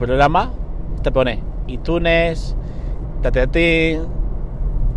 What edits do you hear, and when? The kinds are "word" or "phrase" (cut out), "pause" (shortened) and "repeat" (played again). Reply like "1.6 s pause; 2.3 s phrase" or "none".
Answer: 1.0 s word; 3.1 s word